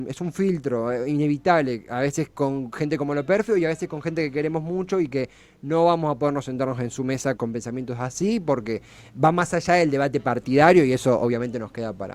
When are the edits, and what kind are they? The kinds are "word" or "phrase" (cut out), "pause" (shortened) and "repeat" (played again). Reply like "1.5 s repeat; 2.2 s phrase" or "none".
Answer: 7.4 s word